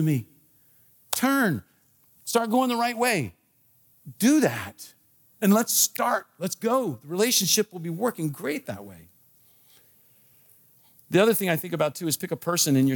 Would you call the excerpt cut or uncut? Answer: uncut